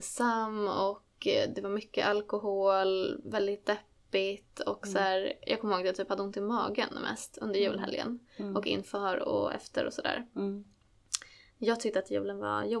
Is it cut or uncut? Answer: uncut